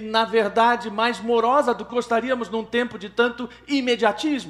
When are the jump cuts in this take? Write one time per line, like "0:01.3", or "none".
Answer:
0:01.9